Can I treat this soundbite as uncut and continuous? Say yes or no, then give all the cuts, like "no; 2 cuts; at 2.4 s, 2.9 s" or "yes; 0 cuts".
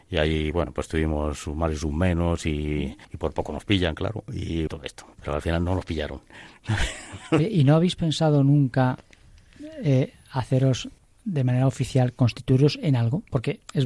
no; 3 cuts; at 3.0 s, 4.7 s, 11.0 s